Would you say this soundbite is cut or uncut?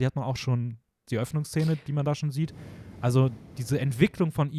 cut